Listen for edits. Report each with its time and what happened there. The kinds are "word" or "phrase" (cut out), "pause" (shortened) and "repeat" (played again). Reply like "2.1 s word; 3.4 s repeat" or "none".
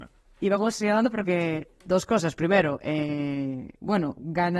none